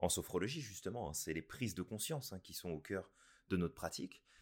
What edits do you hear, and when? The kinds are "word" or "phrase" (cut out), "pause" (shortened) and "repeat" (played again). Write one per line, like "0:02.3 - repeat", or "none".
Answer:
none